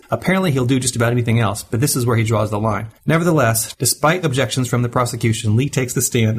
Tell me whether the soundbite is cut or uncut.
cut